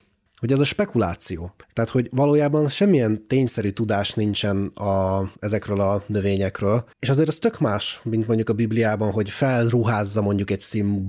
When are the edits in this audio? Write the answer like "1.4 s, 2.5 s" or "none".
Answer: 1.6 s, 5.3 s, 6.9 s